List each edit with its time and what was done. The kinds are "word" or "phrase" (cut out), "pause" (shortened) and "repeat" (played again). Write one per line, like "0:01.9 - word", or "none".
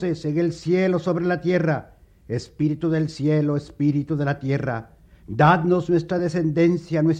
none